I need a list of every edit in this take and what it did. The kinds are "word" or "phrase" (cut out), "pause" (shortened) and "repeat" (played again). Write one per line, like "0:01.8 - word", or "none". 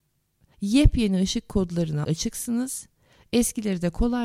0:02.0 - word